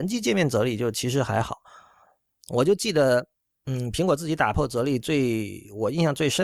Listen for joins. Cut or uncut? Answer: uncut